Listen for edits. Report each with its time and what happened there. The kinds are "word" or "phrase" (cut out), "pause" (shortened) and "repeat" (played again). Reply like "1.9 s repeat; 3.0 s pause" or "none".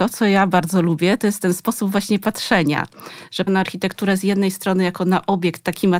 3.5 s word